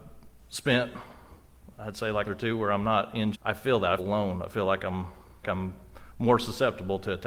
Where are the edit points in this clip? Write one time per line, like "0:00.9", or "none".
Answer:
0:02.2
0:03.3
0:04.0
0:05.4

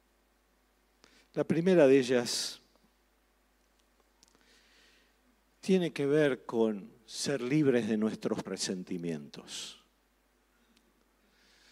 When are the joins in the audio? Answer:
0:08.5

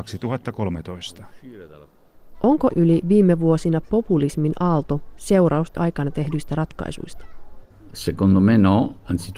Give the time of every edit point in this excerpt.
0:02.7
0:03.8
0:05.7

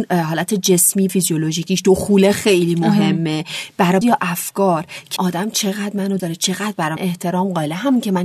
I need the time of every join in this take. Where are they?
0:01.1
0:04.0
0:05.2
0:06.2
0:07.0

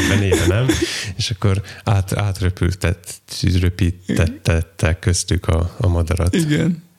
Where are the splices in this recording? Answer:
none

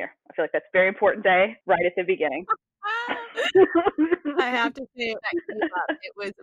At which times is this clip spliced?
0:01.2
0:05.2

